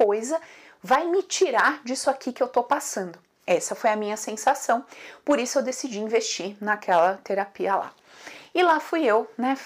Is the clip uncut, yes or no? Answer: yes